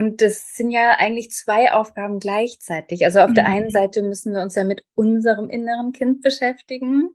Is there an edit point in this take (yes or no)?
no